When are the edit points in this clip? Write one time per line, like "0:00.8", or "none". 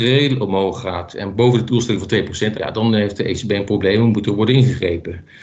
0:01.7
0:02.5